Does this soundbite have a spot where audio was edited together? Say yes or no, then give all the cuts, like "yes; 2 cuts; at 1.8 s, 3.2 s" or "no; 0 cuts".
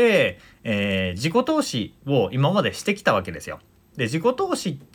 no; 0 cuts